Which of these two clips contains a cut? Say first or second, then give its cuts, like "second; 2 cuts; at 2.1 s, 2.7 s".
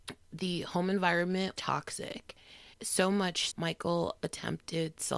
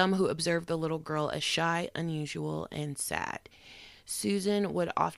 first; 3 cuts; at 1.6 s, 2.7 s, 3.5 s